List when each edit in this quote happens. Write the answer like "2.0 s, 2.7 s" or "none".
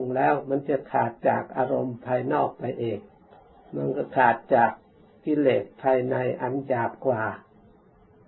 3.3 s, 5.1 s